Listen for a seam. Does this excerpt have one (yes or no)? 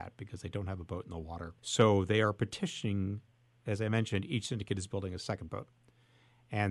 yes